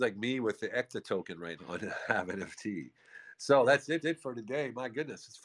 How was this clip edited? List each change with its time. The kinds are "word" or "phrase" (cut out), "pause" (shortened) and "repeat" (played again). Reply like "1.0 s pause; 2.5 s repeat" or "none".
1.6 s word; 4.0 s repeat